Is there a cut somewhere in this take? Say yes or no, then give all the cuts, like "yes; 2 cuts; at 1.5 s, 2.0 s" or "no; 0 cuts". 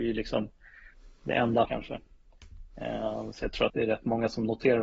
yes; 2 cuts; at 1.6 s, 3.7 s